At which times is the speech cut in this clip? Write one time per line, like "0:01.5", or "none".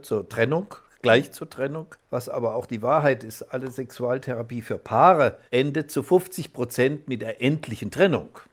0:02.0
0:05.5